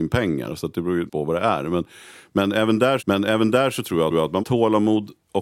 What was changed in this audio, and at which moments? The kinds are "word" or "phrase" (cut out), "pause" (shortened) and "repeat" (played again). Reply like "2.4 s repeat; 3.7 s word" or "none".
1.1 s word; 3.0 s repeat; 4.1 s repeat; 4.4 s phrase